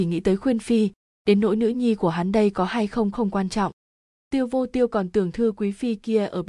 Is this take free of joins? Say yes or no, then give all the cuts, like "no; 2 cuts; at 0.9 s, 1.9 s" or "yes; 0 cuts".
no; 1 cut; at 3.1 s